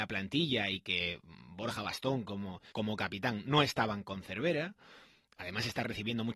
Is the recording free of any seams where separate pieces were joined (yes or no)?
no